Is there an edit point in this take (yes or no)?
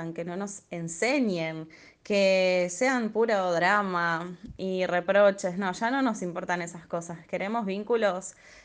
no